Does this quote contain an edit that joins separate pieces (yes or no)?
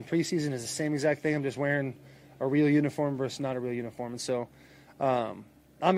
no